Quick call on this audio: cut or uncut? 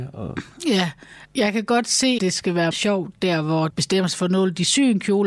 cut